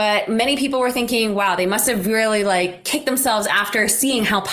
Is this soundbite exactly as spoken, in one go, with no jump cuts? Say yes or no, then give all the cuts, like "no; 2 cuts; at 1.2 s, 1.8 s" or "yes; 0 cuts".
yes; 0 cuts